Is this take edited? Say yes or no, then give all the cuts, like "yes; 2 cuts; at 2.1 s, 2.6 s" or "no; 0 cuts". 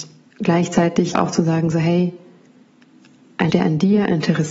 yes; 2 cuts; at 1.1 s, 3.5 s